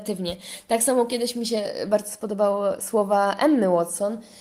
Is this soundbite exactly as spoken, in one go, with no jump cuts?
yes; 0 cuts

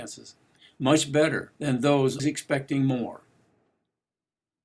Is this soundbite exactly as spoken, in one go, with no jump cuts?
no; 2 cuts; at 1.6 s, 2.2 s

